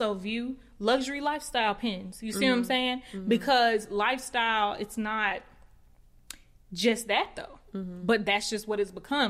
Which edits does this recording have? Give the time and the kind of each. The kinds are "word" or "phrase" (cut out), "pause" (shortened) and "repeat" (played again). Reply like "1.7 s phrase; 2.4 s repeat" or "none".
none